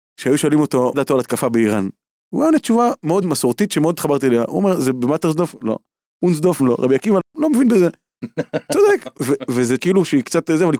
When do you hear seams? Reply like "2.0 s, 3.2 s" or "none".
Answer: 0.9 s, 3.2 s, 6.6 s, 7.2 s, 9.2 s, 9.8 s

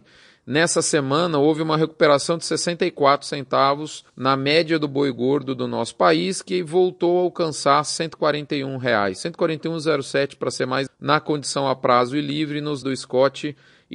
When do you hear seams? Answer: 4.1 s, 10.9 s, 12.8 s

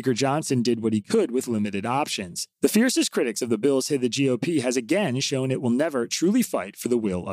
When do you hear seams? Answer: 2.5 s

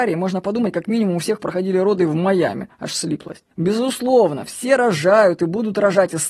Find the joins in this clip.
3.5 s

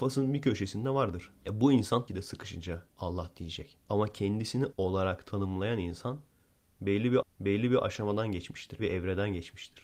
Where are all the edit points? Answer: 1.4 s, 2.1 s, 2.9 s, 3.8 s, 4.7 s, 7.2 s, 8.8 s

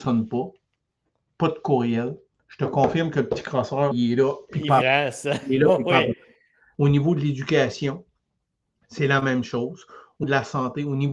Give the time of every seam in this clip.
3.9 s, 4.8 s, 6.7 s, 10.2 s

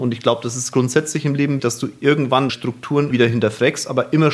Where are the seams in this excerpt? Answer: 1.6 s, 2.5 s, 3.1 s

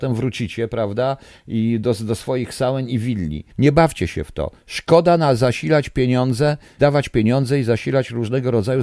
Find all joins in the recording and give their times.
3.5 s, 6.8 s

